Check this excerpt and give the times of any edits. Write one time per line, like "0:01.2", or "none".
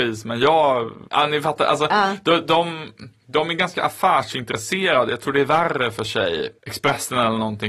0:01.1
0:06.6